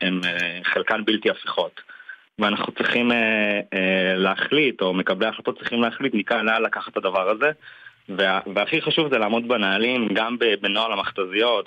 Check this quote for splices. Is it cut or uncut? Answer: uncut